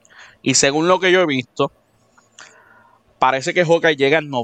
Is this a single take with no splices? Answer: yes; 0 cuts

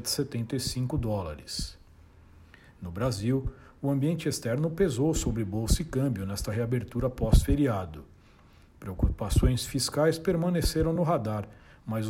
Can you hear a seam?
no; 0 cuts

